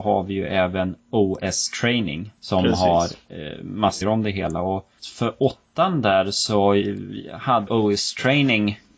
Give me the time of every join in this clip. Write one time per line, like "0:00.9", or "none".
0:02.4
0:04.0
0:05.0
0:07.7

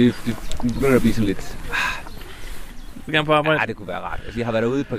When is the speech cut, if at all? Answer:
0:03.1

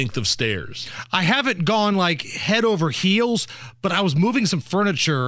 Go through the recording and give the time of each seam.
none

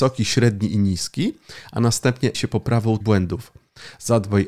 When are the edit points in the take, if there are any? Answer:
0:02.3
0:03.0

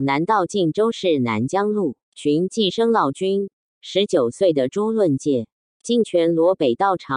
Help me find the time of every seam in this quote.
0:02.0

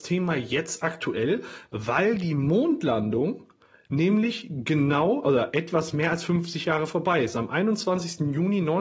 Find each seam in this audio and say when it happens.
none

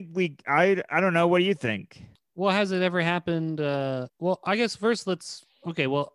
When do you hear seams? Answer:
0:02.1
0:04.1

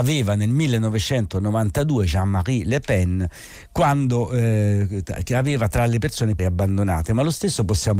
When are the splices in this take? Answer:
0:06.4

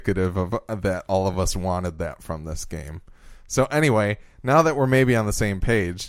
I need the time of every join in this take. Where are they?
none

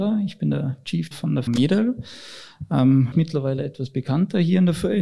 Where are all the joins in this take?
0:01.1
0:01.5
0:03.1

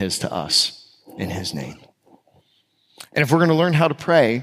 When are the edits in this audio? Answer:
none

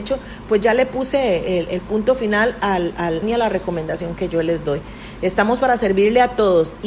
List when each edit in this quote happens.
0:03.2

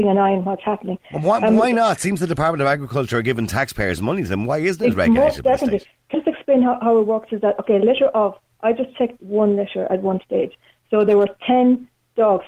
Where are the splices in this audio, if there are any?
0:06.1

